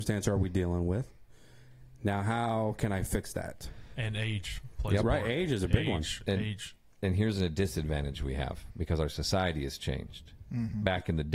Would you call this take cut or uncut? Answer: uncut